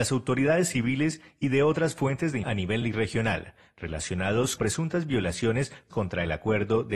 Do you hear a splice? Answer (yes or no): yes